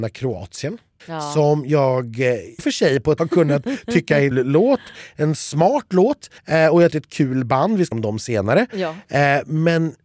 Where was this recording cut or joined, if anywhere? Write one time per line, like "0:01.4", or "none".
0:01.0
0:02.6
0:03.2
0:04.3
0:06.4
0:06.9
0:07.9